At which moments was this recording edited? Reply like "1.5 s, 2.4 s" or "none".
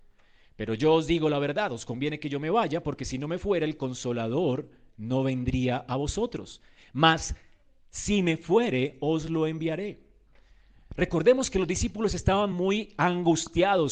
none